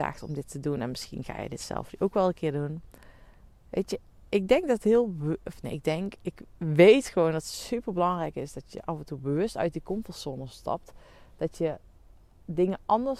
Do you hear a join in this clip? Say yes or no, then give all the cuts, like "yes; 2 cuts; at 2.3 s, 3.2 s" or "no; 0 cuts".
no; 0 cuts